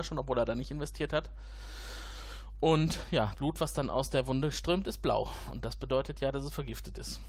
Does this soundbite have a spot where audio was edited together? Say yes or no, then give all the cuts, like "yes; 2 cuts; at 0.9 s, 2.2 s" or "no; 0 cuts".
yes; 1 cut; at 3.3 s